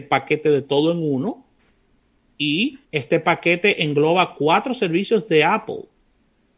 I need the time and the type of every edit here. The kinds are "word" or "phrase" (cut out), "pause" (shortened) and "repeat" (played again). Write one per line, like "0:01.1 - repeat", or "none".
0:02.8 - pause